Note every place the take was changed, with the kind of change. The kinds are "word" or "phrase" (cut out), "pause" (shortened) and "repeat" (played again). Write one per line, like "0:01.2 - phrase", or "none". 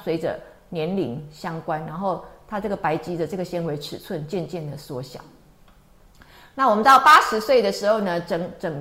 none